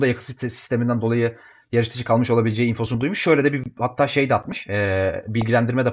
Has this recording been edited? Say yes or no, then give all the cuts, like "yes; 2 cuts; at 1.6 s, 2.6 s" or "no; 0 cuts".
no; 0 cuts